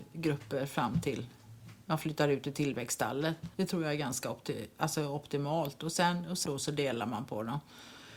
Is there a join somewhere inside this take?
yes; 1 cut; at 3.5 s

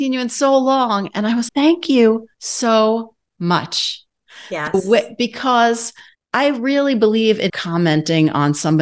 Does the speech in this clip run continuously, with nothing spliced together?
no; 4 cuts; at 1.5 s, 2.3 s, 6.1 s, 7.5 s

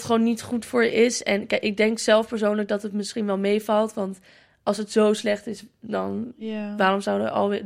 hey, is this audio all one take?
yes; 0 cuts

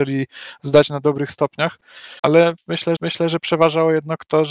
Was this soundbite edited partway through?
yes; 2 cuts; at 2.2 s, 3.0 s

